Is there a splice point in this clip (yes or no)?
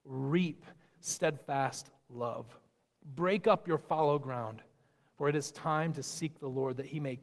no